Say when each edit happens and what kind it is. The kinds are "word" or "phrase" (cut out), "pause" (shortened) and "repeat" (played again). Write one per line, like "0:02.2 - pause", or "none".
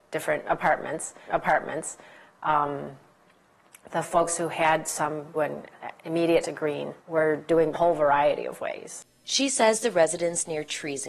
0:01.3 - repeat
0:05.3 - word
0:06.4 - word
0:07.0 - pause
0:07.7 - phrase